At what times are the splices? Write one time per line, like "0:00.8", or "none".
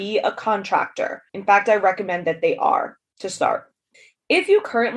0:01.3
0:03.9